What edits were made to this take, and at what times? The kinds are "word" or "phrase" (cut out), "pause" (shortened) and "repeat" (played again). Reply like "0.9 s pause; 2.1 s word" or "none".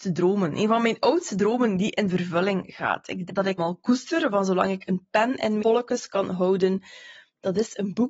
3.3 s word; 3.6 s word; 5.6 s word